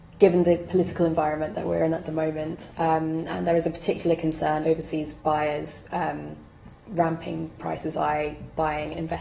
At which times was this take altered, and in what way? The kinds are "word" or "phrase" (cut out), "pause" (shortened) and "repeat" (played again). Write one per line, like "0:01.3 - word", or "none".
0:04.6 - word
0:05.2 - pause
0:07.6 - word
0:07.9 - word